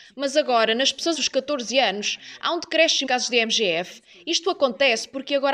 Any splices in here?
yes; 2 cuts; at 1.1 s, 3.1 s

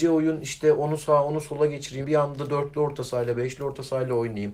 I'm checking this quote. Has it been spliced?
yes; 1 cut; at 2.0 s

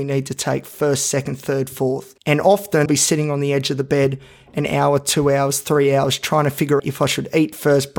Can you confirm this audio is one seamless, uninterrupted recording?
no; 3 cuts; at 2.2 s, 2.9 s, 6.8 s

